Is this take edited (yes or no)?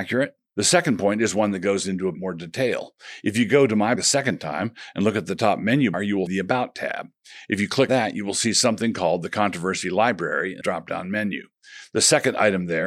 yes